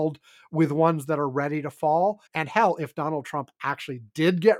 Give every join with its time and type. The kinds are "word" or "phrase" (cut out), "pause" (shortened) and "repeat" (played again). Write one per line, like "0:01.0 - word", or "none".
0:02.3 - pause